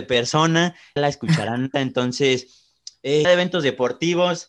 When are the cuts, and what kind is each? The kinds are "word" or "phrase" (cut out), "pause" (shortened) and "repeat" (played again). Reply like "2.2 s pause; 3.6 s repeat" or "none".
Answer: 1.0 s word; 1.7 s word; 3.2 s word